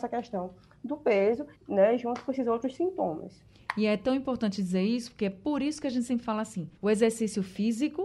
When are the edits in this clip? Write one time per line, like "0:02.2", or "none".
0:01.5
0:06.8